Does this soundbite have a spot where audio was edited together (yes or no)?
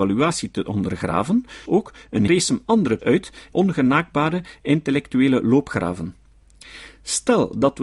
yes